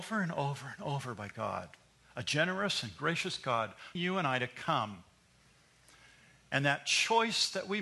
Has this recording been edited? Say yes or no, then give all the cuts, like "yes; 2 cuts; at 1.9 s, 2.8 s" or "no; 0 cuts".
yes; 1 cut; at 3.9 s